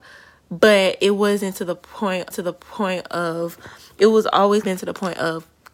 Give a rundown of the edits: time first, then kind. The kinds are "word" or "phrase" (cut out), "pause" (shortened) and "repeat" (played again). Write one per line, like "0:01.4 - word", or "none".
0:02.3 - repeat
0:04.6 - phrase